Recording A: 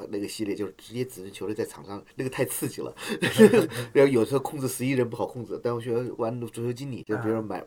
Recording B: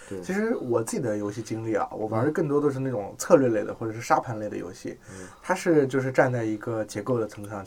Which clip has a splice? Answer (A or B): A